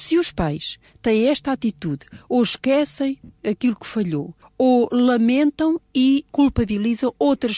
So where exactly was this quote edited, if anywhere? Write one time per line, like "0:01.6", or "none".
0:04.4

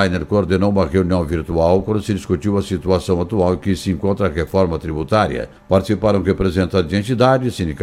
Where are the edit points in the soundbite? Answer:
none

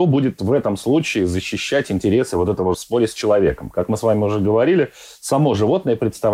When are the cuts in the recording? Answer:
0:02.7

